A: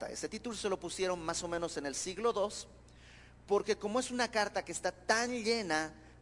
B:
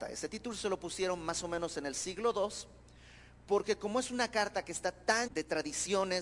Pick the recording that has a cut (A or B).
B